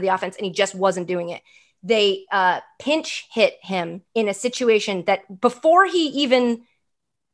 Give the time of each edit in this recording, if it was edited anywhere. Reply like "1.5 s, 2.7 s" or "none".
4.1 s